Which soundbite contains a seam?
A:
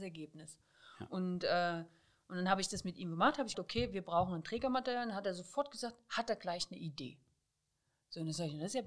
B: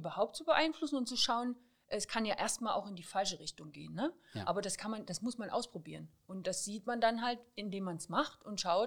A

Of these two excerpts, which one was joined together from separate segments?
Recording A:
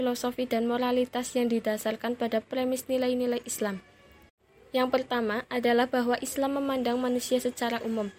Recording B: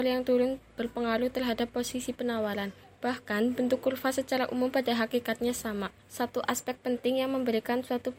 B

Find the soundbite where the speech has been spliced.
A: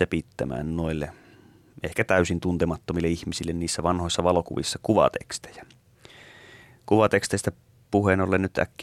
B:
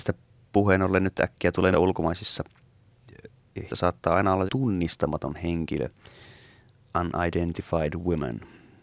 B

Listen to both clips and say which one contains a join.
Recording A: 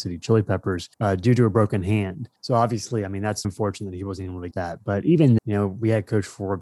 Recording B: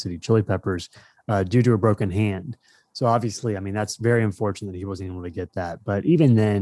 A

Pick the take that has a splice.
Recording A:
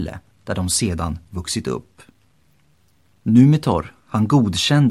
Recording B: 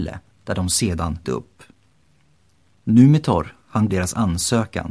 B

